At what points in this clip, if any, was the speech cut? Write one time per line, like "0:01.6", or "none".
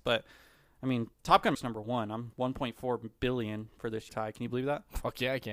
0:01.1
0:01.5
0:02.3
0:04.1